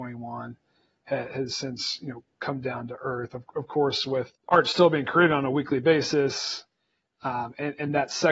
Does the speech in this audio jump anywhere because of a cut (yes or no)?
no